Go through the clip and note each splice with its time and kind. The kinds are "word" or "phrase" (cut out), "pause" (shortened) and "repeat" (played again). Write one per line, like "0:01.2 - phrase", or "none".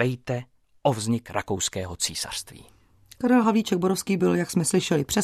none